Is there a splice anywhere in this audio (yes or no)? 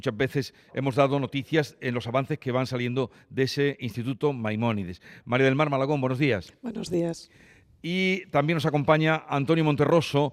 no